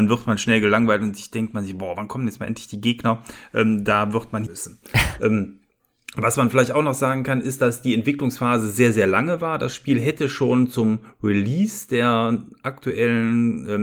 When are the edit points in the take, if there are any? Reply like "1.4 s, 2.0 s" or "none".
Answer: 4.5 s